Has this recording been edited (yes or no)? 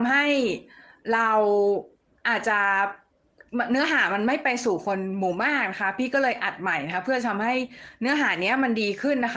no